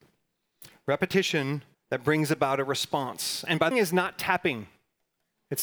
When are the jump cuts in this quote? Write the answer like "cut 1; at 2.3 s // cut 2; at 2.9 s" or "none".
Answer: cut 1; at 1.7 s // cut 2; at 3.7 s